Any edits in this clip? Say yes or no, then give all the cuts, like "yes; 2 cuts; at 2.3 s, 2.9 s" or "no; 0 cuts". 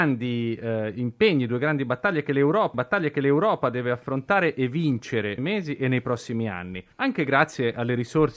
yes; 3 cuts; at 2.7 s, 5.4 s, 6.9 s